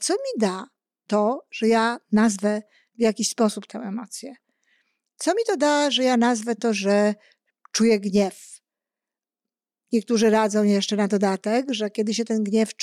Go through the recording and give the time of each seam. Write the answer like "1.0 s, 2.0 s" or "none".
none